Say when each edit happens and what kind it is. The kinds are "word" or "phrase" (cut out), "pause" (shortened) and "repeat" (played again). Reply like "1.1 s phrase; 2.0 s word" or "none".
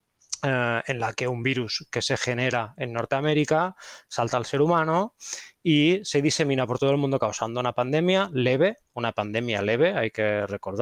8.8 s pause